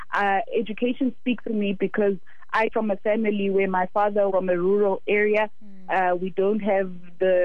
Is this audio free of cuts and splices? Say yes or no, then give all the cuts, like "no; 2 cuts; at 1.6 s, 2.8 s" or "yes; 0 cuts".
no; 3 cuts; at 1.5 s, 2.7 s, 4.3 s